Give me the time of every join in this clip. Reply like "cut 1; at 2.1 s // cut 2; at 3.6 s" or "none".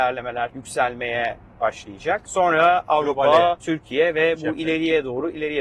none